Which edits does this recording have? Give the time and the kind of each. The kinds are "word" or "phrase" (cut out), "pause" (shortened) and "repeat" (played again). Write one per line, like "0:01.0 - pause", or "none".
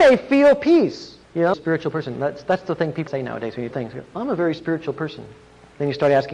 0:01.2 - pause
0:01.5 - phrase
0:03.1 - word
0:03.7 - phrase